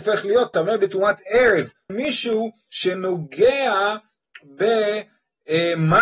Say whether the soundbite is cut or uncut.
cut